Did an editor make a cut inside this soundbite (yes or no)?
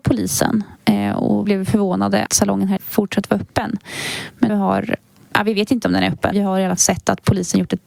yes